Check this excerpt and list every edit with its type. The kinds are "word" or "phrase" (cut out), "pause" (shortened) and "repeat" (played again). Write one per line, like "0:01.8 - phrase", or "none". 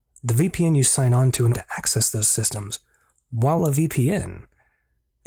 0:01.5 - word
0:03.6 - word